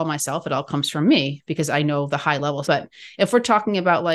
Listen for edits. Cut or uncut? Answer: cut